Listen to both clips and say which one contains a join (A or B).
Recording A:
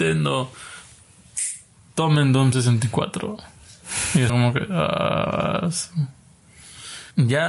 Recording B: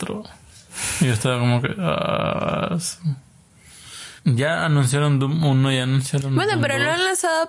A